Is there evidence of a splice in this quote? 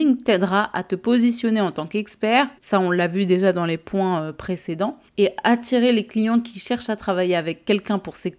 yes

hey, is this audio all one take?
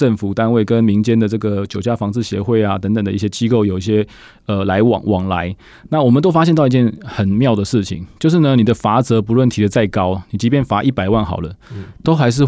yes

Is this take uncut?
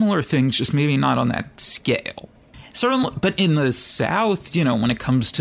yes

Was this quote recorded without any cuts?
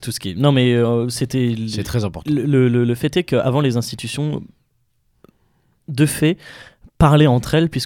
yes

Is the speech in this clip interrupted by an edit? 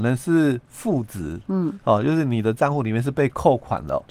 no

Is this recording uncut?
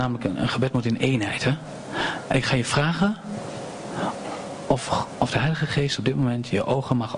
yes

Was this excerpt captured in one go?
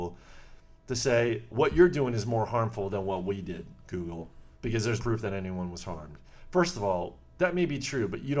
no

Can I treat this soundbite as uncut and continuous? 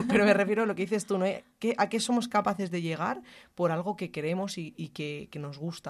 yes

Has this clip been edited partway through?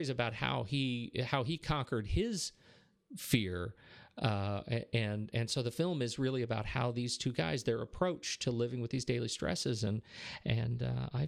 no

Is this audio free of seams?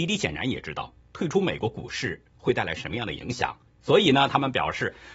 no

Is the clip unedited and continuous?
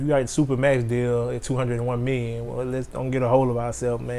yes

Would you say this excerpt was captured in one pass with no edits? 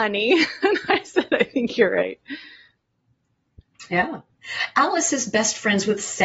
yes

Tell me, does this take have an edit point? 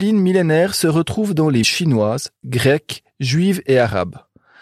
yes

